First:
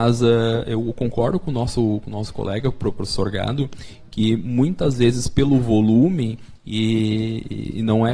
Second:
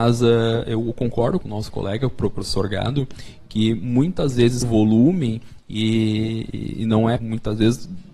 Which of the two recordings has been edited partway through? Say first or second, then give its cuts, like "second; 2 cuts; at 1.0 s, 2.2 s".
second; 3 cuts; at 1.4 s, 4.6 s, 7.2 s